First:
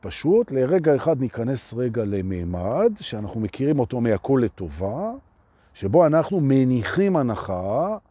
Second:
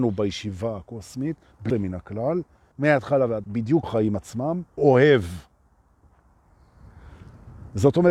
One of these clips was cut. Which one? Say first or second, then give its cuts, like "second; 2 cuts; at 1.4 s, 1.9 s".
second; 5 cuts; at 1.7 s, 2.7 s, 3.4 s, 3.8 s, 4.8 s